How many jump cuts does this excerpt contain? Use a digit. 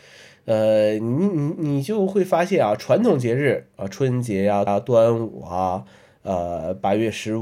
1